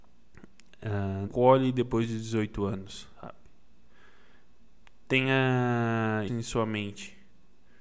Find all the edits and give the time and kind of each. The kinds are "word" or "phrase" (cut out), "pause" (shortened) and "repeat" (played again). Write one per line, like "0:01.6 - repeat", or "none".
0:01.3 - word
0:06.3 - word